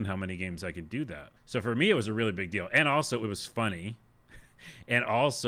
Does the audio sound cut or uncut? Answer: cut